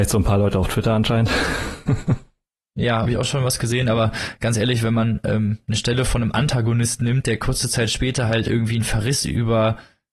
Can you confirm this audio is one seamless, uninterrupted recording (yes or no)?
no